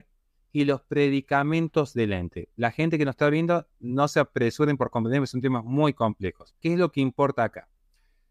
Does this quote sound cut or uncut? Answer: cut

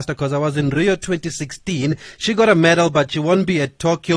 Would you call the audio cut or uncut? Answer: uncut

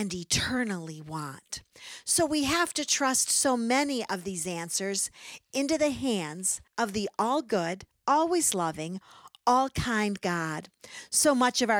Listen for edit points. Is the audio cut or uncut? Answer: cut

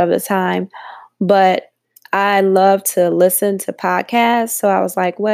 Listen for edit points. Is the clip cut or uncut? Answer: cut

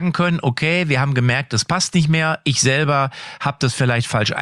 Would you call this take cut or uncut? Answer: uncut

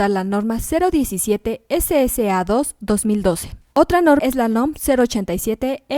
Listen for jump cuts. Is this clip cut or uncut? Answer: cut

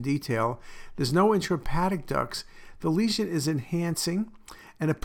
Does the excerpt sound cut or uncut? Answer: uncut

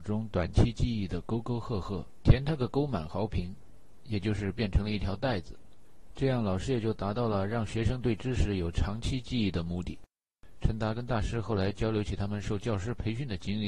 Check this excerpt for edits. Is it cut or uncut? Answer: cut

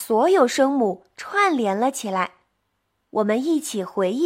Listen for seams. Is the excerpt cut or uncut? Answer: uncut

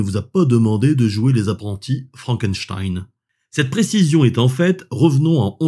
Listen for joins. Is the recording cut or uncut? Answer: uncut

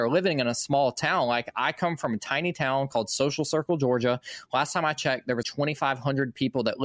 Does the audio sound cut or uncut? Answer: cut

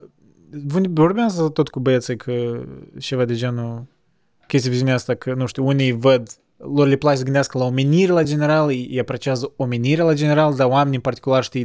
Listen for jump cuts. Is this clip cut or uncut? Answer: uncut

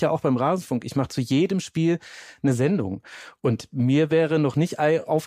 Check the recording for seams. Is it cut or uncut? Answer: uncut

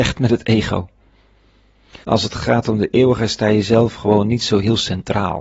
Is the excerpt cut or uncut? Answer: cut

